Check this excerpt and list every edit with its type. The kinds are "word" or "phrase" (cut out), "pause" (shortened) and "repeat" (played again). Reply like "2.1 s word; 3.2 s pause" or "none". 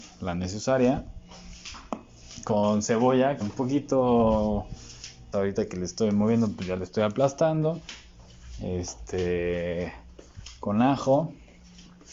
3.4 s word; 5.3 s word